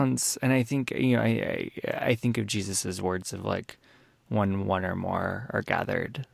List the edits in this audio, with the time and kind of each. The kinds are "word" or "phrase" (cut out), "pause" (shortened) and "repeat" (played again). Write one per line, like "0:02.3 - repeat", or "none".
none